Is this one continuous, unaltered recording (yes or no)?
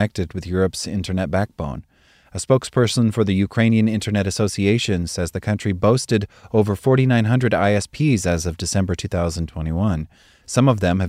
yes